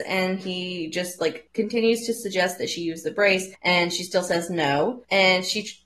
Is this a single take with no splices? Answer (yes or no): yes